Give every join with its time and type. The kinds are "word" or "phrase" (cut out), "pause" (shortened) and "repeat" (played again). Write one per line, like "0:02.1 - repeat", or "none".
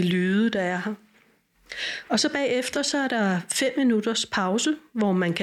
none